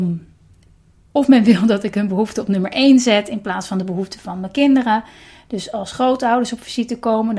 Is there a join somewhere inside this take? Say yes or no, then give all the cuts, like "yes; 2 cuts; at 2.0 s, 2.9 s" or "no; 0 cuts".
no; 0 cuts